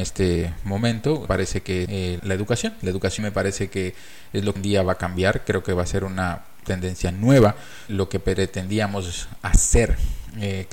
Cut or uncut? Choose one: cut